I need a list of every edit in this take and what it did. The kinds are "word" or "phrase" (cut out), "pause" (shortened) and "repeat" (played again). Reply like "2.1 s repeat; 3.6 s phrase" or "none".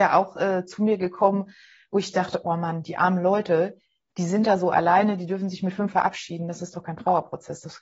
5.9 s word